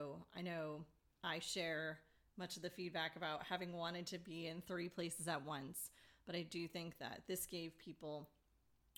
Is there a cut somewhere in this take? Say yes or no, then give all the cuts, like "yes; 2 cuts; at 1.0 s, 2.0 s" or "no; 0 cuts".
no; 0 cuts